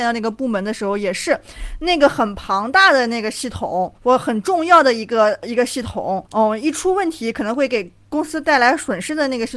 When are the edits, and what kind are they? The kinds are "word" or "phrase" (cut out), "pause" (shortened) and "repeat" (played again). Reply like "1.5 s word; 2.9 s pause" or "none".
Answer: 4.0 s pause; 6.3 s pause